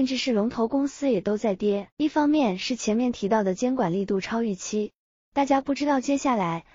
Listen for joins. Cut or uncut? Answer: cut